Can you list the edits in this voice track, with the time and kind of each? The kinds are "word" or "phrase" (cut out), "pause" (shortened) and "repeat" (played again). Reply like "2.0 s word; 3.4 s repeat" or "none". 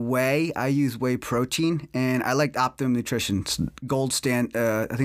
none